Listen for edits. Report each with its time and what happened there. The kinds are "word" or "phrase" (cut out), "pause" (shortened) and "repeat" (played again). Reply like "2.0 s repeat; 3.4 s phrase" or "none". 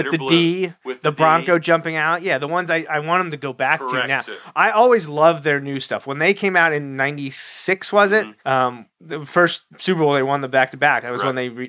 8.4 s pause